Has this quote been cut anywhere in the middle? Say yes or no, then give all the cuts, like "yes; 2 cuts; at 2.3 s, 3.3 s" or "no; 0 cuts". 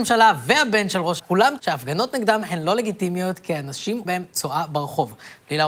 yes; 3 cuts; at 1.2 s, 1.6 s, 4.1 s